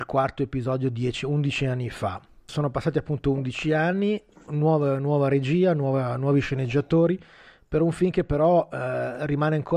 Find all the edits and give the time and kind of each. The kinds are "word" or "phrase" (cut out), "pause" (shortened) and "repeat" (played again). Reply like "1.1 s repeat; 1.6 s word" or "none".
none